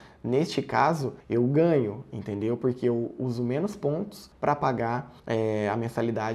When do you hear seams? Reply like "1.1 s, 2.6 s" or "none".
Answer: 1.2 s, 4.3 s, 5.2 s